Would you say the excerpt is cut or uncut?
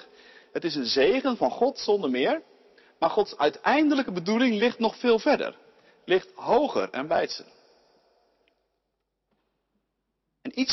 uncut